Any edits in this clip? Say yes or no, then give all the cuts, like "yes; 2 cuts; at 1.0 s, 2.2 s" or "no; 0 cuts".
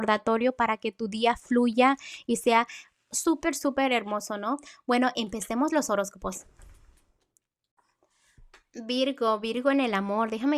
no; 0 cuts